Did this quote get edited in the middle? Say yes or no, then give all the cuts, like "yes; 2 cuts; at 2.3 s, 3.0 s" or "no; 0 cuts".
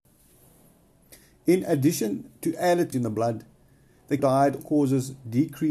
yes; 3 cuts; at 2.9 s, 4.2 s, 4.6 s